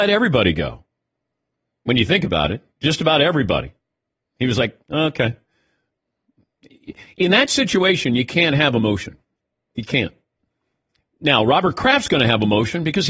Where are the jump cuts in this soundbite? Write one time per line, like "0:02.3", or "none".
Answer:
none